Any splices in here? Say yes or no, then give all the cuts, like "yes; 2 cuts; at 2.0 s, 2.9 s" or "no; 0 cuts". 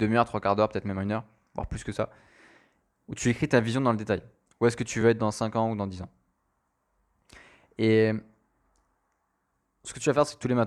no; 0 cuts